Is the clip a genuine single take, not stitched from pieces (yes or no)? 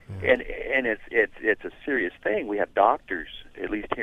yes